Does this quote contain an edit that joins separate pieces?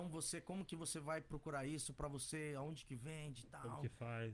no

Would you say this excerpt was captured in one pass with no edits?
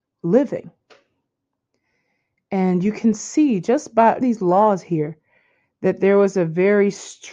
no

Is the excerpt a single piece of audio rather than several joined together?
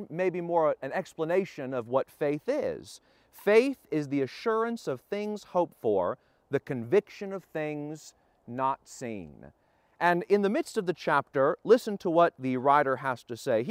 yes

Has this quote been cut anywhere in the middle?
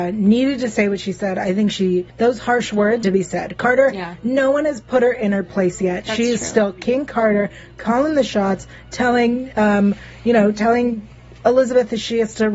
yes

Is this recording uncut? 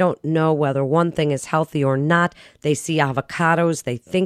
yes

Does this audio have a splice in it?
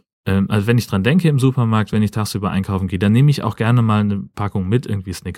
no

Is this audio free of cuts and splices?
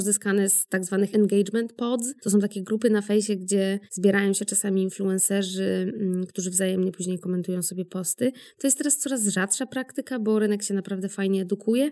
no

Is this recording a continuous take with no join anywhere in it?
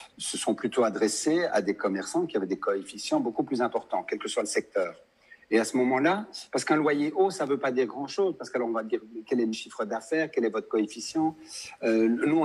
yes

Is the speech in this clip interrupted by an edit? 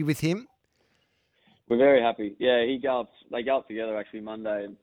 no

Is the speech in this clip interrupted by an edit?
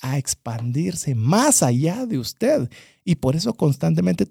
no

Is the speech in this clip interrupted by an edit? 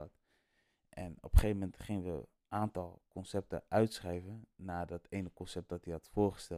no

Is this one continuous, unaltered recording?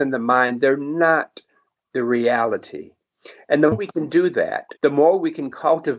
no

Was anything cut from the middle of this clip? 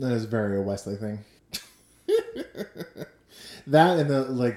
yes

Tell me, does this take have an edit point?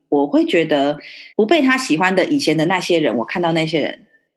yes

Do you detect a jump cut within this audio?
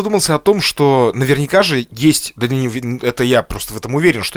no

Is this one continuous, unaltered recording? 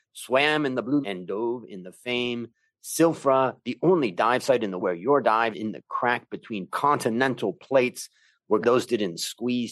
no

